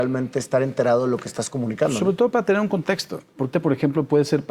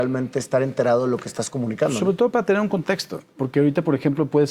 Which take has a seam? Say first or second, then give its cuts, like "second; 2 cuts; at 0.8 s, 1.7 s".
first; 1 cut; at 3.5 s